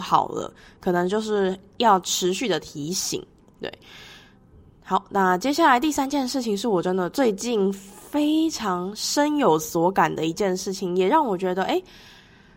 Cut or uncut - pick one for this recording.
uncut